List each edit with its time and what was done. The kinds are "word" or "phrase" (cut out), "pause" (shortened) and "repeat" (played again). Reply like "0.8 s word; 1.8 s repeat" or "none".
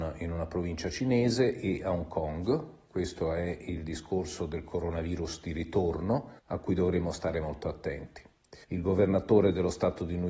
6.4 s pause; 8.6 s pause